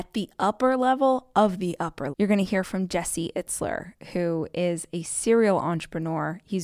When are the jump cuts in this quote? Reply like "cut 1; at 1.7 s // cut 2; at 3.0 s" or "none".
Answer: cut 1; at 2.1 s